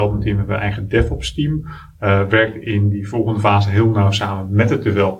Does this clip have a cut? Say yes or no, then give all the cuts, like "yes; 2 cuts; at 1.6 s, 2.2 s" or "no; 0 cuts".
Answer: no; 0 cuts